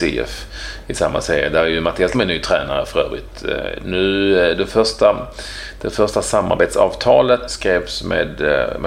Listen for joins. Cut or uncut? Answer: cut